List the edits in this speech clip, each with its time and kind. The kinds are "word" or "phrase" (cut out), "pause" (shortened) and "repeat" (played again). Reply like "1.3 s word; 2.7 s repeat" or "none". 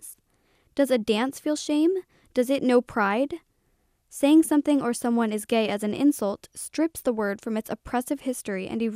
none